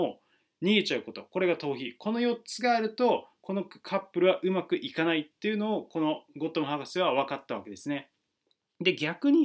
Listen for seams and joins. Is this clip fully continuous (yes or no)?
yes